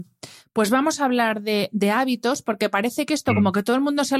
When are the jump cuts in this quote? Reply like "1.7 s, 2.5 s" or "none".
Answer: none

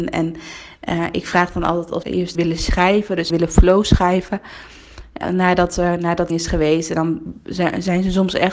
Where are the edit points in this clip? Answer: 2.0 s, 2.3 s, 3.3 s, 5.2 s, 6.3 s

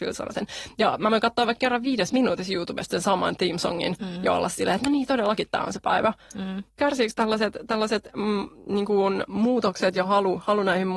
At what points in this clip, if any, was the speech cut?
6.7 s

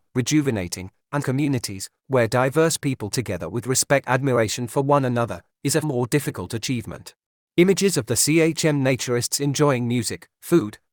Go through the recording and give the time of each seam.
1.2 s, 3.1 s, 4.1 s, 5.8 s, 7.4 s

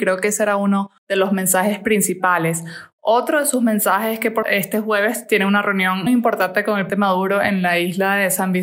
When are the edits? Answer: 1.0 s, 4.4 s, 6.1 s, 6.9 s

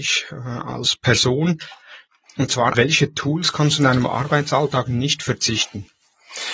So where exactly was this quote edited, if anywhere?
2.7 s

